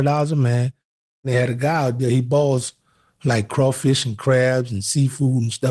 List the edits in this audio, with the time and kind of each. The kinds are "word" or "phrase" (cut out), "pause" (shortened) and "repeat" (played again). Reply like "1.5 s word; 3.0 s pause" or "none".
none